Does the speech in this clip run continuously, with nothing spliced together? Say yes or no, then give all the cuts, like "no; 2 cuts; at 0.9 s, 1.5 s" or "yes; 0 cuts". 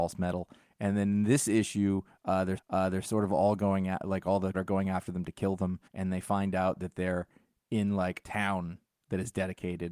no; 4 cuts; at 2.6 s, 4.5 s, 5.9 s, 8.2 s